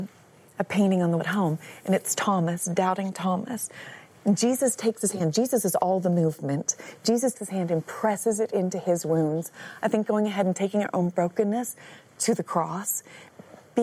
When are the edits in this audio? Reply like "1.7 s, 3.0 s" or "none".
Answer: 1.2 s, 7.3 s